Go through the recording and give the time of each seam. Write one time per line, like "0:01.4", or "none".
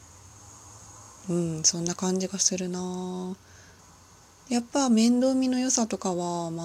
0:03.8